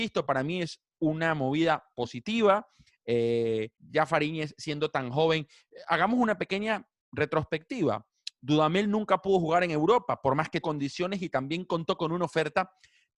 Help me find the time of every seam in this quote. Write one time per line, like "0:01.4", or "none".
0:03.7
0:10.6